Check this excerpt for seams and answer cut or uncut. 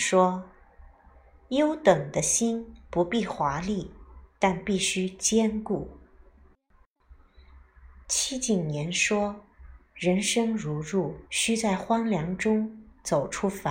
cut